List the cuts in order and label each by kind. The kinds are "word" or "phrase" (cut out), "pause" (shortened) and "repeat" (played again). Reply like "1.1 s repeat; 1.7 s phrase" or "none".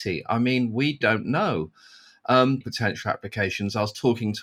1.0 s word; 2.6 s phrase